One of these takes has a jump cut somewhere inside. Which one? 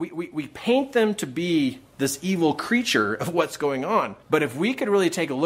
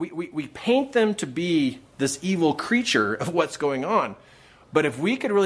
first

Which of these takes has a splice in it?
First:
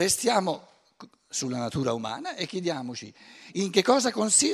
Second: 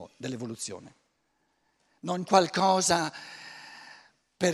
second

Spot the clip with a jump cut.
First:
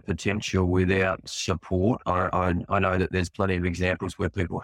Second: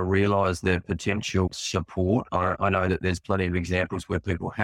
second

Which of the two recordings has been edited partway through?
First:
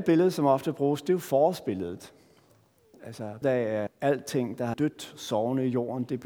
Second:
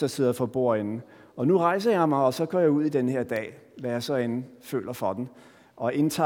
first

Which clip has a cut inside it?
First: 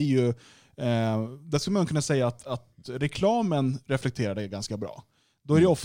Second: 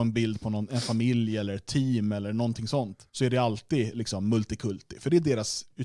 second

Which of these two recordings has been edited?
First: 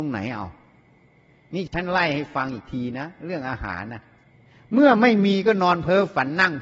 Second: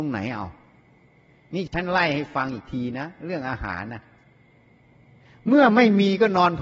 first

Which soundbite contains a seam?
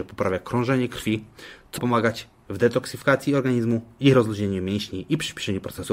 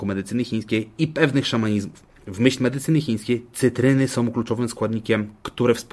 first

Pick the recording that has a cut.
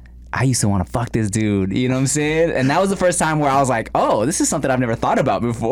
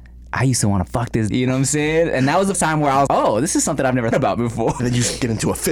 second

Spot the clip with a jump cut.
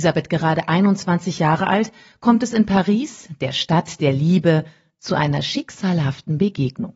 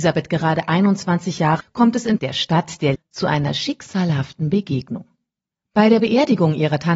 second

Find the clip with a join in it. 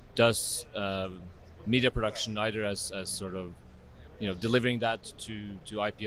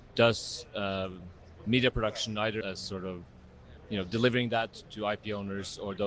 second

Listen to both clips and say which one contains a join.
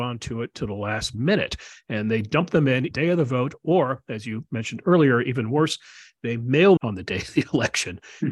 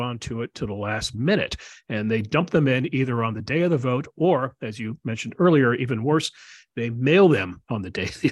first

